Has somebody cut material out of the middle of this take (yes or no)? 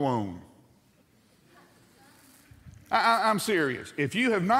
no